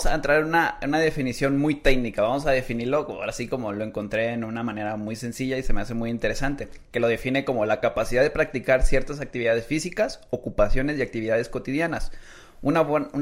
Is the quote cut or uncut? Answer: uncut